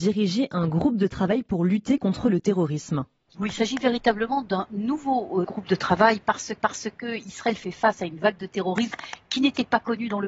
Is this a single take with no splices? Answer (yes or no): no